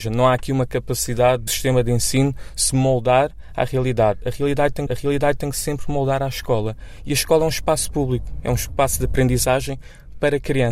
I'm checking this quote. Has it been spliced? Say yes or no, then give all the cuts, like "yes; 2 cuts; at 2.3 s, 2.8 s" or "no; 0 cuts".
yes; 2 cuts; at 1.5 s, 4.9 s